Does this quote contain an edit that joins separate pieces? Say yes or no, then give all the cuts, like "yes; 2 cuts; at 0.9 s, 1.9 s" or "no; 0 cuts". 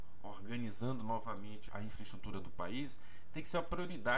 yes; 1 cut; at 1.7 s